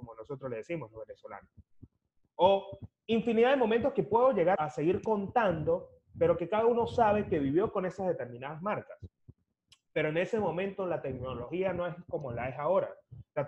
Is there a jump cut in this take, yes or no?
yes